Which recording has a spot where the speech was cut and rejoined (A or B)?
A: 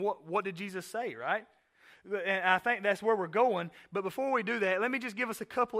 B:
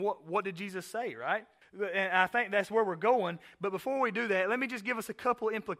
B